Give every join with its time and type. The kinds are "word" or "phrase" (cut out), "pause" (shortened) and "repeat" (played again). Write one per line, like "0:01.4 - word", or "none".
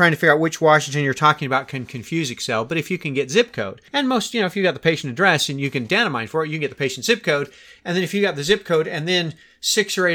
0:03.9 - pause